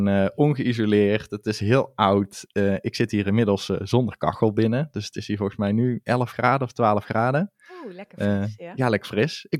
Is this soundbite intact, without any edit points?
yes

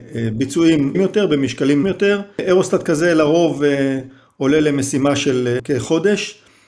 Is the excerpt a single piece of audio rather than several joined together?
no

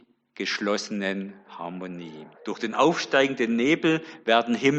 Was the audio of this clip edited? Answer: yes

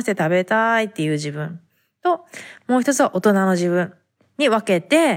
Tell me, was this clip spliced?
no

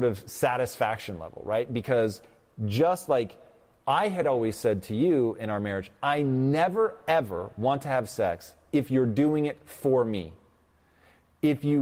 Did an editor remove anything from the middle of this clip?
no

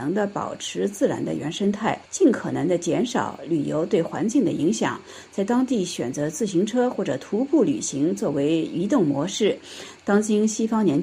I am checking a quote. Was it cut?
yes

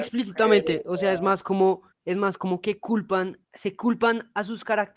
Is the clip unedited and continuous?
no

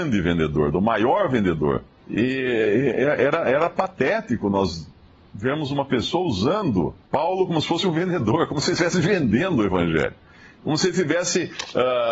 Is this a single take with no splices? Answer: no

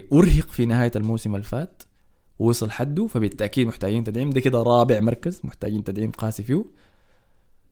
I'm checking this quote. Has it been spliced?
no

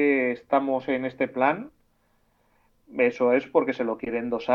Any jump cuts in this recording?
no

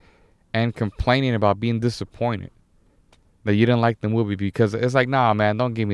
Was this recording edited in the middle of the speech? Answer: no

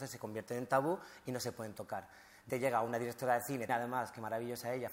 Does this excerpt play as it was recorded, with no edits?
no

